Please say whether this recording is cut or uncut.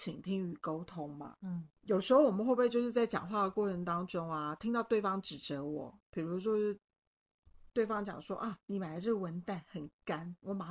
cut